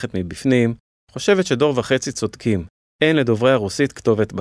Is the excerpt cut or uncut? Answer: uncut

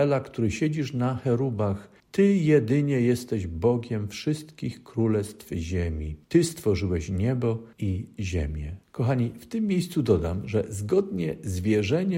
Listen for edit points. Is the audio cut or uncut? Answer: cut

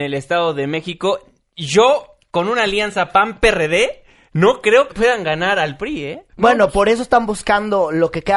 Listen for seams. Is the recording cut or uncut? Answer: cut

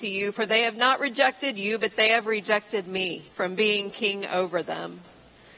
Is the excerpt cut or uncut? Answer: cut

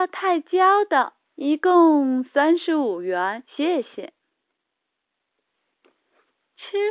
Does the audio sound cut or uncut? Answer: cut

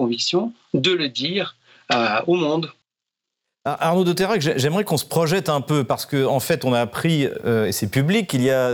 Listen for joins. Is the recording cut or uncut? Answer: uncut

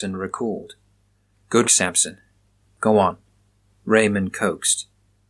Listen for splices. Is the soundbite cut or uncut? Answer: cut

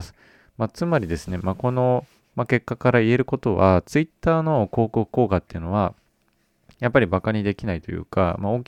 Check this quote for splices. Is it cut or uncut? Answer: uncut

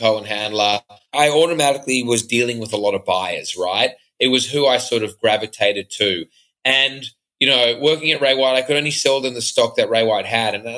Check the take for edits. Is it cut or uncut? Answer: uncut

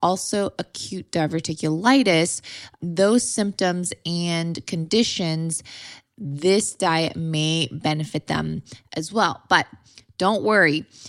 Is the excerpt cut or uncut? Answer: uncut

